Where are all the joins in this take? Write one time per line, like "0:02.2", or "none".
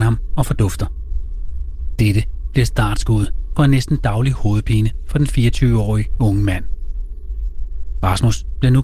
none